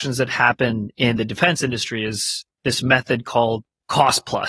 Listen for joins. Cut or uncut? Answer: uncut